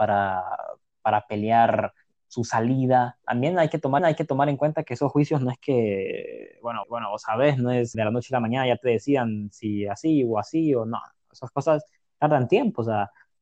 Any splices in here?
yes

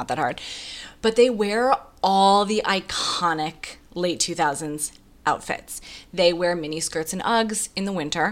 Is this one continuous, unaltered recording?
yes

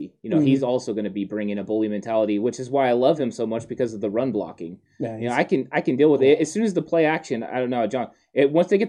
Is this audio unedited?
yes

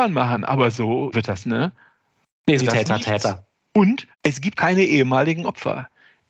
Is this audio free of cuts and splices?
no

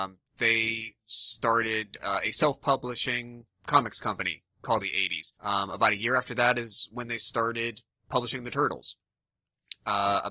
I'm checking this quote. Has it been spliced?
yes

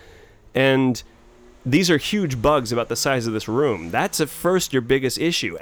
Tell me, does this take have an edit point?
no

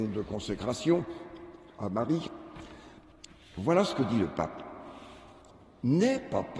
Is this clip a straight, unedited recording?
yes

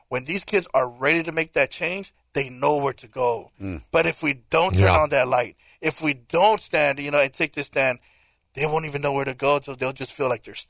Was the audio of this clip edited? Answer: no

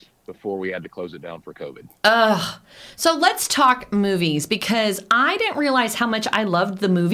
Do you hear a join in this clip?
no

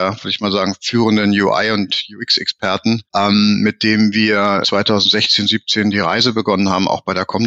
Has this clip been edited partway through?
yes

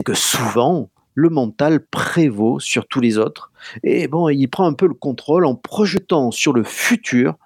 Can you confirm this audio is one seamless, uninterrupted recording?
yes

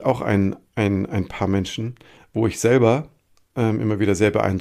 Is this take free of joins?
yes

